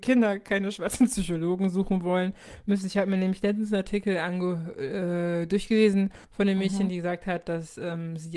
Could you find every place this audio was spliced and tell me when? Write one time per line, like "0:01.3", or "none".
0:06.2